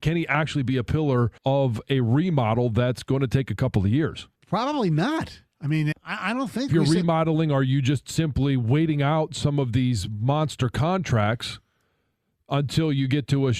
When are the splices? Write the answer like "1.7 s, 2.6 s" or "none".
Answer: 1.4 s, 4.4 s, 5.9 s, 6.7 s

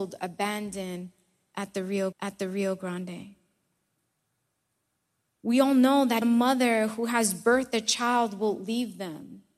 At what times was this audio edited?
2.1 s, 6.2 s

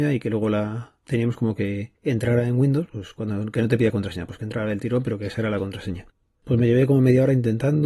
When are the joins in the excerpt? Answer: none

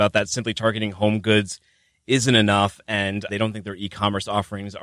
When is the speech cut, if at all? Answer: 3.3 s

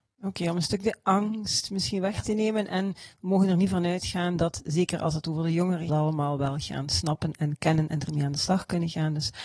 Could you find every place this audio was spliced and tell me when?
5.9 s

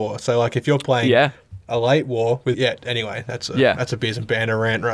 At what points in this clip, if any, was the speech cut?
2.5 s

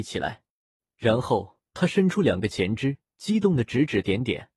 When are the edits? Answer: 1.7 s, 3.0 s

